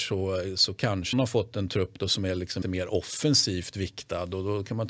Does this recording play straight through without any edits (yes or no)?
no